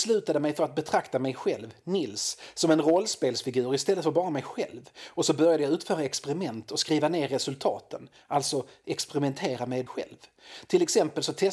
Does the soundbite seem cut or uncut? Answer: cut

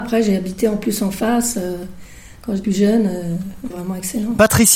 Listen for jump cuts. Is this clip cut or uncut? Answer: cut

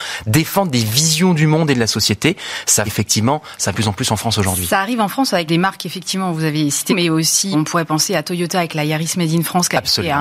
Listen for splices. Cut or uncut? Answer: cut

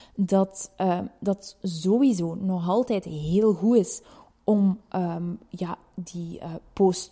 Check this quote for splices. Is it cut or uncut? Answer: uncut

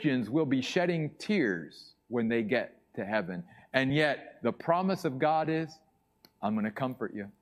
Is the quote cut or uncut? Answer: uncut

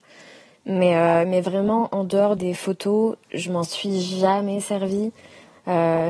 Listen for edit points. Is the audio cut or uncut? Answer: cut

